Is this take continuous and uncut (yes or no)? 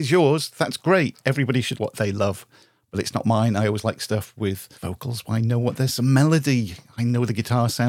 no